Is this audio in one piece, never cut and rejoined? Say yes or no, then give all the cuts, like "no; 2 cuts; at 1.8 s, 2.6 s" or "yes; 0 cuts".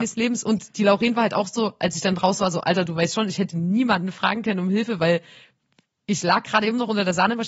yes; 0 cuts